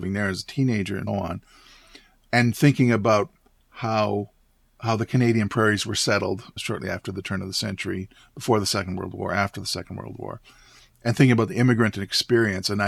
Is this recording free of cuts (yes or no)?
no